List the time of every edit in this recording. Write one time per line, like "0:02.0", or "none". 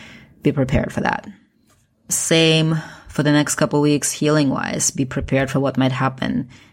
none